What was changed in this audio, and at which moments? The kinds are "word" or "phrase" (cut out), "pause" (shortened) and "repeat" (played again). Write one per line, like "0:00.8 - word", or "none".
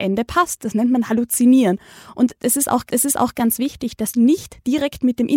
0:02.9 - repeat
0:04.1 - word